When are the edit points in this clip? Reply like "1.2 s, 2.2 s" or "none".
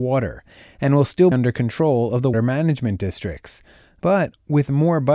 1.3 s, 2.3 s